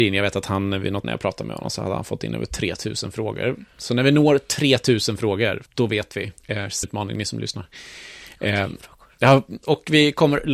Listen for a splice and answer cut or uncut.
cut